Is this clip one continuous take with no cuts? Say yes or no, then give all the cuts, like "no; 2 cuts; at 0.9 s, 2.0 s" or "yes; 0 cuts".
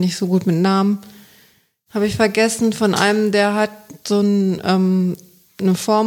yes; 0 cuts